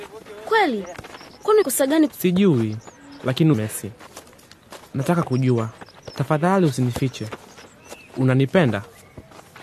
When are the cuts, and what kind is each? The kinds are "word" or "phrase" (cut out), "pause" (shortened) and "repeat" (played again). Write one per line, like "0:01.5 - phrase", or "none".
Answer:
0:01.6 - word
0:02.1 - phrase
0:03.5 - word
0:04.9 - word